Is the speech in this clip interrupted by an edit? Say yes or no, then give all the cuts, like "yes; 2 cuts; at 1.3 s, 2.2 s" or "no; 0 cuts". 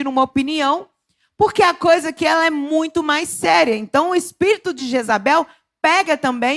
no; 0 cuts